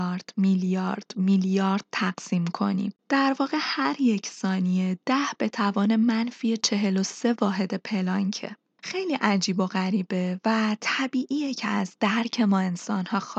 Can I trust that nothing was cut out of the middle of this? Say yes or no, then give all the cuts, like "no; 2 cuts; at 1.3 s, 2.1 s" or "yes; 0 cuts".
yes; 0 cuts